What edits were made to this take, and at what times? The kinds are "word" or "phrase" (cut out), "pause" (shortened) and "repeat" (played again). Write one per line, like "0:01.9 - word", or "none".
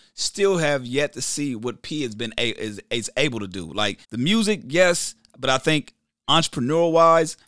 0:04.0 - pause